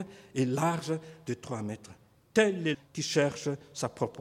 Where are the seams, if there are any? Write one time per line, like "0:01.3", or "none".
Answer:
0:02.7